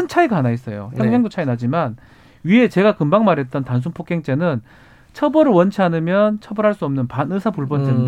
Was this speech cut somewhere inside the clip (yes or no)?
no